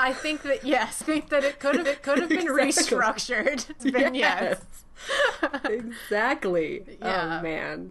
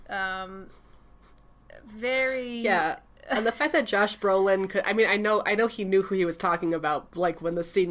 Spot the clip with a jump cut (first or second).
first